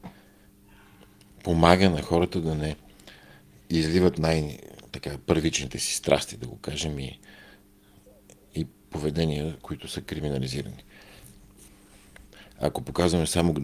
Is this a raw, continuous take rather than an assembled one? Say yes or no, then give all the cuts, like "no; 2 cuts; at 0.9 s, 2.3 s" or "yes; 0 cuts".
yes; 0 cuts